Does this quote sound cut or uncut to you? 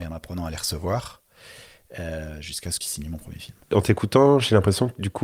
cut